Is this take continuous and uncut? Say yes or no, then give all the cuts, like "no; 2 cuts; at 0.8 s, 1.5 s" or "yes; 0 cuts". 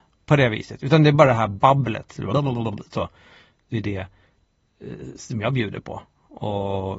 yes; 0 cuts